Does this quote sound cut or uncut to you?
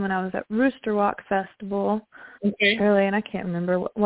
cut